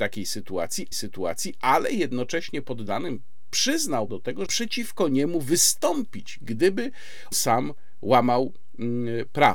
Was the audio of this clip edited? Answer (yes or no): yes